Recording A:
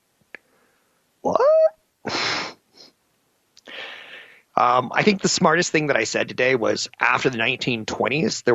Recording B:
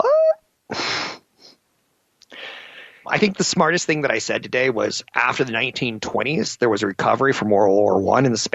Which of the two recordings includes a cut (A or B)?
B